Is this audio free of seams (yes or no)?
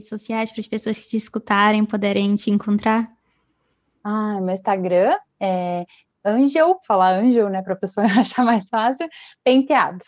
yes